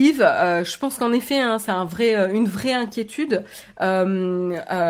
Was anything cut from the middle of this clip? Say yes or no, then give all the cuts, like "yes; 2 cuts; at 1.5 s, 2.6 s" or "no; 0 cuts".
no; 0 cuts